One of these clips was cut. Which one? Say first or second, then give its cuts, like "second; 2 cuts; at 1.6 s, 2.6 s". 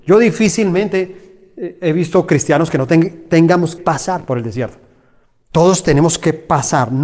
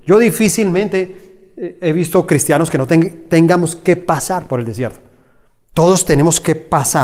first; 1 cut; at 3.8 s